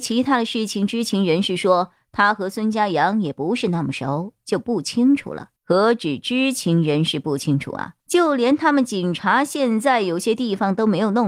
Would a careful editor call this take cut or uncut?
cut